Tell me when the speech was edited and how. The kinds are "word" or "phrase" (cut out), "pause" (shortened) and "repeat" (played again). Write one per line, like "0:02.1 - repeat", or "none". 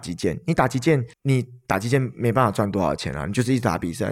0:01.1 - pause